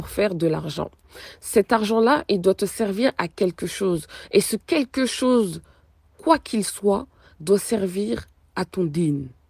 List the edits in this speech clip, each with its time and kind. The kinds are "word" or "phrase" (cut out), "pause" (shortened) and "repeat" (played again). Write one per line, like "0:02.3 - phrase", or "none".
none